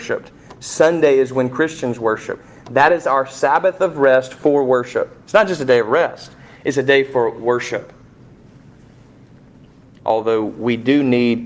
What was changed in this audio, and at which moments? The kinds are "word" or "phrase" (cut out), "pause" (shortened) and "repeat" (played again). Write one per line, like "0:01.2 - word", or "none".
none